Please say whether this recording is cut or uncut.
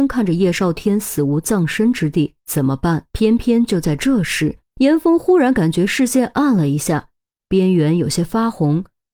cut